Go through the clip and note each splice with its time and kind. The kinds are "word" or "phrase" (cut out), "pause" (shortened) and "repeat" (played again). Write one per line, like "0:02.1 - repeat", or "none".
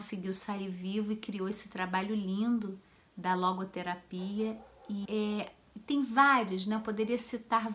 0:05.0 - word